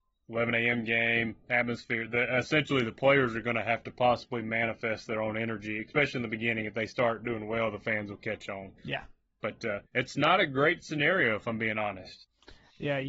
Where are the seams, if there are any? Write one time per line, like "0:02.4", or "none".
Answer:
0:08.8
0:09.9